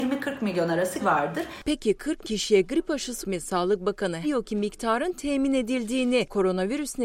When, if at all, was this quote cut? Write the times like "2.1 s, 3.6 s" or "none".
1.0 s, 2.2 s, 3.2 s, 4.2 s